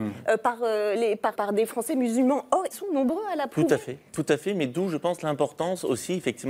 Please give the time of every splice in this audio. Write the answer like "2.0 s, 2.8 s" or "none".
1.3 s, 2.7 s, 4.1 s